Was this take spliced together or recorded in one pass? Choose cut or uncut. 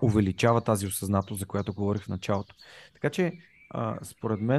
uncut